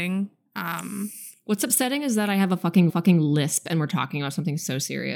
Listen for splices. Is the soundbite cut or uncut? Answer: cut